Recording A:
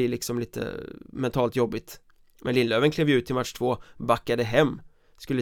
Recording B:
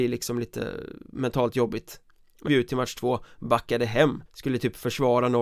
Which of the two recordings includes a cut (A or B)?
B